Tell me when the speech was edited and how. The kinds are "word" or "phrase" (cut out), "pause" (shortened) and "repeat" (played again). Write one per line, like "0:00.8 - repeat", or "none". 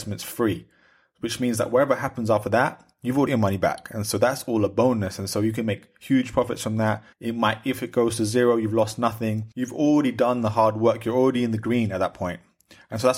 0:03.3 - word
0:07.1 - pause
0:09.5 - pause

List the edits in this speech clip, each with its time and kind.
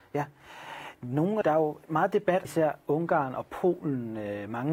0:01.4 - word
0:01.8 - pause
0:02.4 - word

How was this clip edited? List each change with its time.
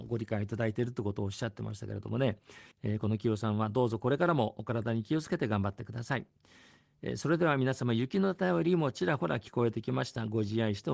0:02.7 - pause

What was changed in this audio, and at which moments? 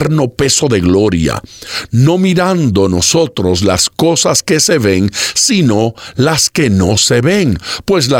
none

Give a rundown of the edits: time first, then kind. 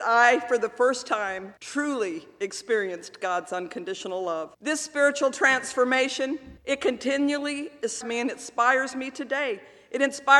0:01.6 - pause
0:04.5 - pause
0:06.6 - pause
0:08.0 - word

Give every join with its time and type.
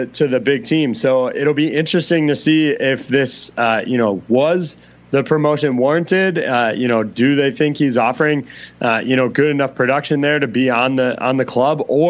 none

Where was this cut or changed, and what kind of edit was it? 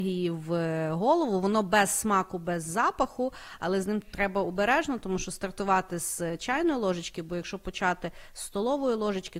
none

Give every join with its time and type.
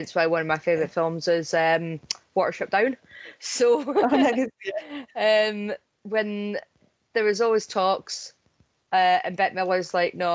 none

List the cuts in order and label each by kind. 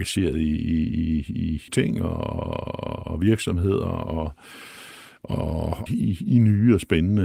0:01.7 - phrase
0:05.9 - phrase

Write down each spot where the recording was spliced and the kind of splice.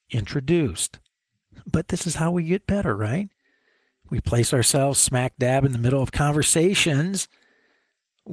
none

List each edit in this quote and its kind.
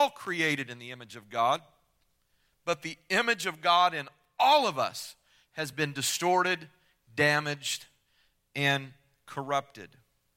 none

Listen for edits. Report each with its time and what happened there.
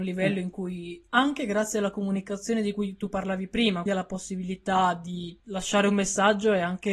0:03.9 - word
0:05.4 - pause

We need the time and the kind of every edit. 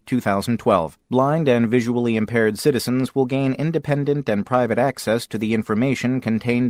0:01.0 - pause

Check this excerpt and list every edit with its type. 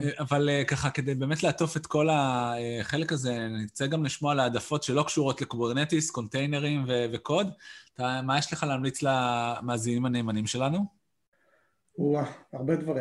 none

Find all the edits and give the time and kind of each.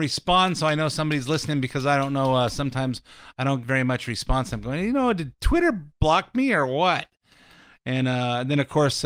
0:03.6 - word

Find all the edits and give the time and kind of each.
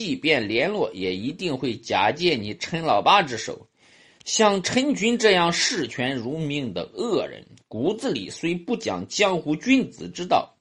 none

